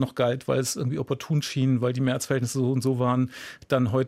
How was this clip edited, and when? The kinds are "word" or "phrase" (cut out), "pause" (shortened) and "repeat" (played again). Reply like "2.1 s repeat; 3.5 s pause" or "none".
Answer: none